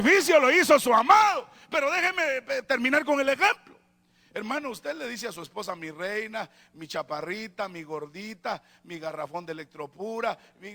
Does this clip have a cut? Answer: no; 0 cuts

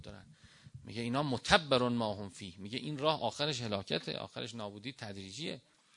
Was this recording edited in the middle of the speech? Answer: no; 0 cuts

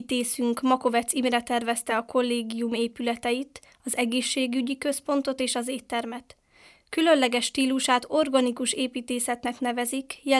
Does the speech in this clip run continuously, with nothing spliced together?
yes; 0 cuts

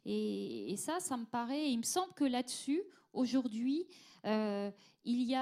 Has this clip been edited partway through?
no; 0 cuts

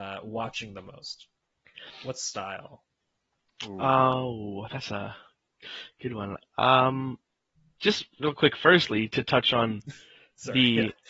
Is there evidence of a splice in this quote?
no; 0 cuts

